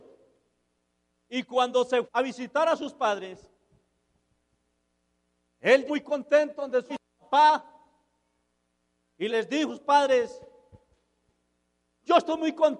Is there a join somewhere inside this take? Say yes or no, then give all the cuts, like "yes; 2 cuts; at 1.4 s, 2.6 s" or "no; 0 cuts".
yes; 5 cuts; at 2.0 s, 5.9 s, 6.9 s, 9.3 s, 9.7 s